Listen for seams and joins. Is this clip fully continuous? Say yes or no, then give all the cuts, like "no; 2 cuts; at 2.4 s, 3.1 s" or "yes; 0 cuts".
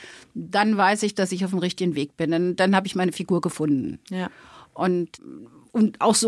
yes; 0 cuts